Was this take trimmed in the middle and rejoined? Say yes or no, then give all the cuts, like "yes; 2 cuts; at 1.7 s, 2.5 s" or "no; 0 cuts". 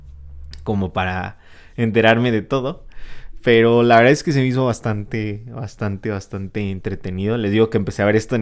no; 0 cuts